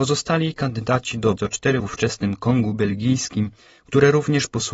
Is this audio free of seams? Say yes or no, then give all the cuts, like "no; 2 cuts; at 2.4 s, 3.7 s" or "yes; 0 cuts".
no; 2 cuts; at 1.4 s, 1.8 s